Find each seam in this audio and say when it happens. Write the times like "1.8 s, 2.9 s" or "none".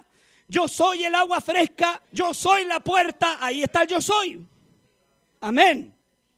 2.0 s